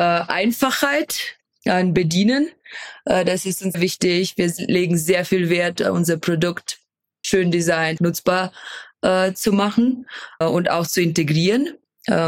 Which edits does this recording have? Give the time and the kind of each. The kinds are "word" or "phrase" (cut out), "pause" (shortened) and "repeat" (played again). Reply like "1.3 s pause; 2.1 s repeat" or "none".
3.7 s word; 7.2 s word; 8.0 s word; 10.4 s word